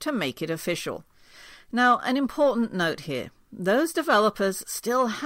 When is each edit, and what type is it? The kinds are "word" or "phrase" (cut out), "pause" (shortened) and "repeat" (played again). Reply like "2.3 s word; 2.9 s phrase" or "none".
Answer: none